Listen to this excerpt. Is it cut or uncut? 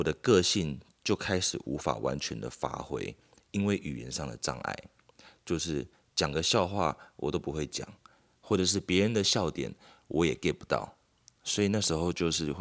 uncut